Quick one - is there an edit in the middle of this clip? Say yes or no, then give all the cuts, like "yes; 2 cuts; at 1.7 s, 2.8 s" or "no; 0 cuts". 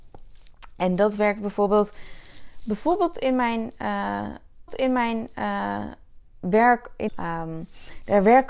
yes; 2 cuts; at 4.7 s, 7.1 s